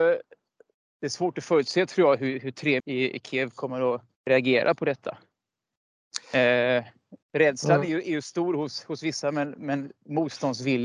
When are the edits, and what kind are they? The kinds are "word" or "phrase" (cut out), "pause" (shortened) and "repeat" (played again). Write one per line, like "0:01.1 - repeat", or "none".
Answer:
0:02.8 - phrase
0:04.1 - pause
0:07.2 - pause